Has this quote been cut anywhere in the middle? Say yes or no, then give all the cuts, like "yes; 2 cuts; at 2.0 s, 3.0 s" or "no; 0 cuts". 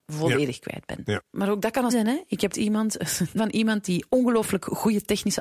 yes; 3 cuts; at 1.9 s, 2.5 s, 3.4 s